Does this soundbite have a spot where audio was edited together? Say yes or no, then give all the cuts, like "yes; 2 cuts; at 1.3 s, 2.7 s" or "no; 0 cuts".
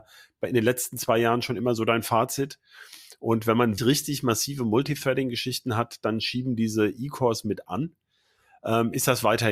yes; 1 cut; at 3.8 s